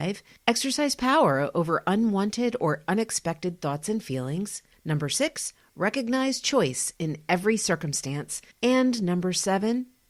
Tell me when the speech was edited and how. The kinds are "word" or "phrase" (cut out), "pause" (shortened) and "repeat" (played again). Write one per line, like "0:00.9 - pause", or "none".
none